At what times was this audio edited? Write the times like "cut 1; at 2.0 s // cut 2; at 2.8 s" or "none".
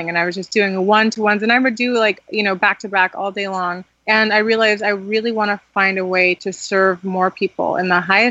cut 1; at 3.9 s

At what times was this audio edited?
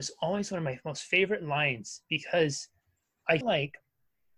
cut 1; at 3.4 s

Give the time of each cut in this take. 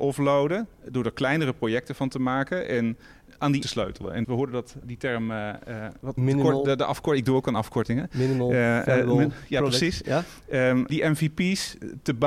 cut 1; at 3.3 s // cut 2; at 3.6 s // cut 3; at 4.2 s // cut 4; at 4.8 s // cut 5; at 6.2 s // cut 6; at 10.9 s

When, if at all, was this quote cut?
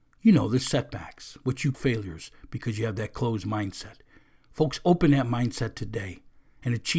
cut 1; at 1.7 s

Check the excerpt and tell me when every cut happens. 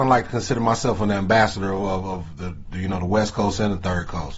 none

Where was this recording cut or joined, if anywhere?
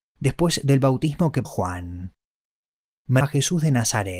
cut 1; at 1.4 s // cut 2; at 3.2 s

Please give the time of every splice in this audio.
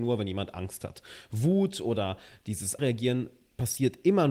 cut 1; at 2.8 s

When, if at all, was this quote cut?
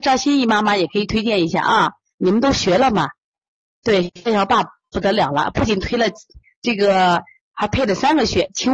none

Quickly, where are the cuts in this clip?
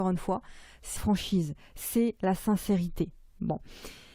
cut 1; at 1.0 s

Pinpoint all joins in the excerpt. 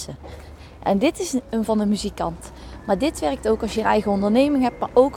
cut 1; at 1.7 s

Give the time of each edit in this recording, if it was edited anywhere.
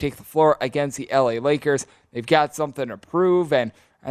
none

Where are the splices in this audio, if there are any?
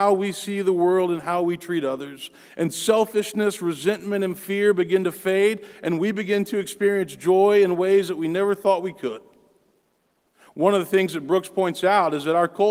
none

